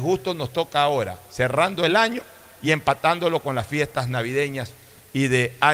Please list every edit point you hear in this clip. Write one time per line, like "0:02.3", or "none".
none